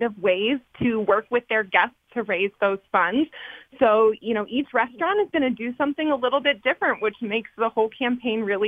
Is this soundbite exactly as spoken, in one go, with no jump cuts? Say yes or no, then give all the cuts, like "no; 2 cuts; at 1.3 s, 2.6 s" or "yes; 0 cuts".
yes; 0 cuts